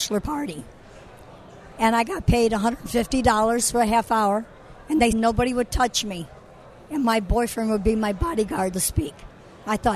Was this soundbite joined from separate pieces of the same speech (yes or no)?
yes